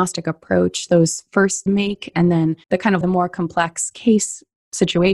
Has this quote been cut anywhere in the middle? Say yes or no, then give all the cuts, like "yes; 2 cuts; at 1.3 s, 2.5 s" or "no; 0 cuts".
yes; 3 cuts; at 1.7 s, 2.6 s, 3.0 s